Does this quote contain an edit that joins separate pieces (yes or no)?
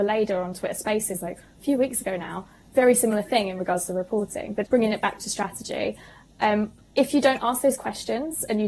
yes